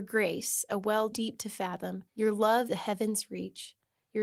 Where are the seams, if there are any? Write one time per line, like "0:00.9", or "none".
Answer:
0:01.1
0:02.1
0:02.7